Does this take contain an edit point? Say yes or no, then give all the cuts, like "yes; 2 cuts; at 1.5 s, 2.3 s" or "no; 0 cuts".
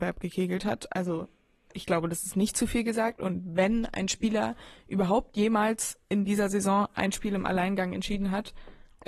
no; 0 cuts